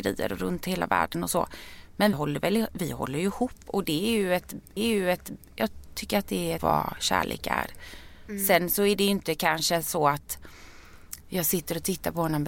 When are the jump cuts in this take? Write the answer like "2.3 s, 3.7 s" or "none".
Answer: 2.1 s, 4.8 s, 6.6 s